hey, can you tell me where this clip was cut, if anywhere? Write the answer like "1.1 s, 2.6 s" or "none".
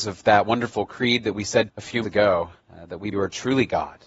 1.7 s, 2.0 s, 2.6 s, 3.1 s